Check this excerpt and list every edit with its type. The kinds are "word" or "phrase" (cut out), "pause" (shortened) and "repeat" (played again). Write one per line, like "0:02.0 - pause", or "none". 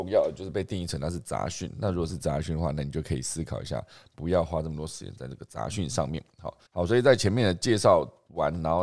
0:06.7 - pause